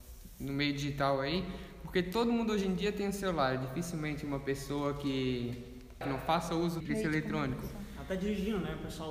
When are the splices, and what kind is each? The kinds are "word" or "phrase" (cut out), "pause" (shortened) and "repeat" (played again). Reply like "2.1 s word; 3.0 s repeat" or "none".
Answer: 6.8 s word